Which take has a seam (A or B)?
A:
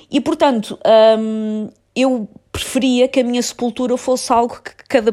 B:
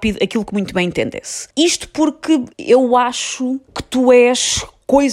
B